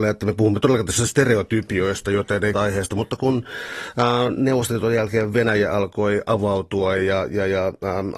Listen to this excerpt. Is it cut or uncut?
cut